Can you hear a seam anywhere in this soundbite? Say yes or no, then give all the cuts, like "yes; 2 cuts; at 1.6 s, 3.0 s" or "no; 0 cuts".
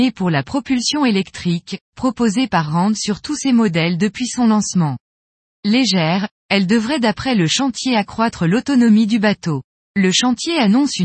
no; 0 cuts